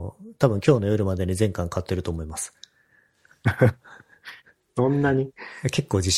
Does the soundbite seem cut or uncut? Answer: uncut